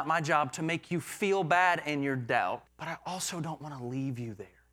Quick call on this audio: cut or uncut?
cut